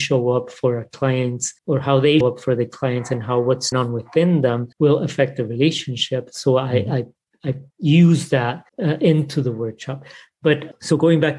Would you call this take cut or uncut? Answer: cut